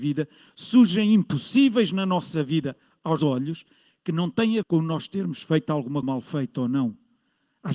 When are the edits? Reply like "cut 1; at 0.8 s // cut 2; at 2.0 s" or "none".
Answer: cut 1; at 3.2 s // cut 2; at 4.6 s // cut 3; at 6.0 s